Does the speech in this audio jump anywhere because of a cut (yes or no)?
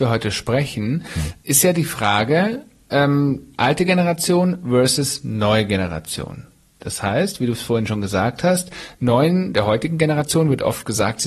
no